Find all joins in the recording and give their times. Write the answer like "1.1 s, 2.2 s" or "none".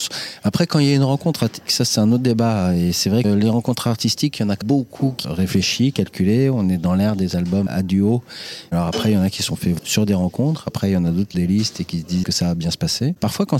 1.7 s, 3.2 s, 4.6 s, 5.2 s, 7.7 s, 9.8 s, 11.3 s, 12.2 s

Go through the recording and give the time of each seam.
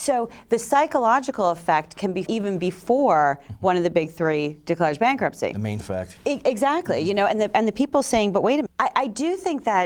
2.3 s, 5.8 s, 8.7 s

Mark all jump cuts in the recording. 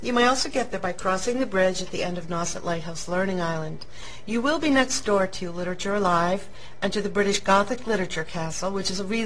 none

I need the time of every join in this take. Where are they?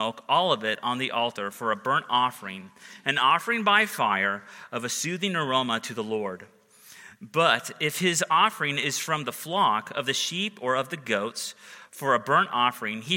none

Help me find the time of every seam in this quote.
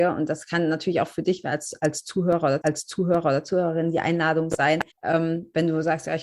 2.6 s, 4.9 s

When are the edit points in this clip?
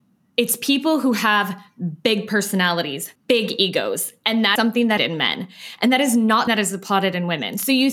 3.2 s, 4.6 s, 5.0 s, 6.5 s

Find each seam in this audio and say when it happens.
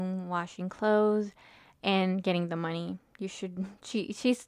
none

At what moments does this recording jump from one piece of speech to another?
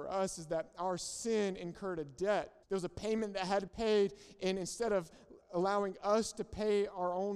2.6 s, 3.7 s

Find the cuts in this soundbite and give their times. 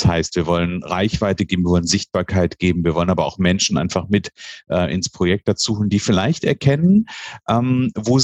none

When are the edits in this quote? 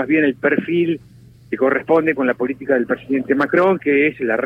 none

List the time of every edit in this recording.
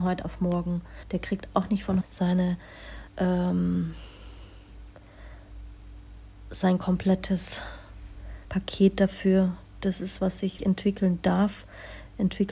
1.0 s, 2.0 s, 3.1 s, 8.4 s, 10.2 s, 10.6 s

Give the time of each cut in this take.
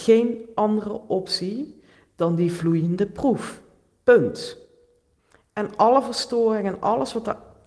none

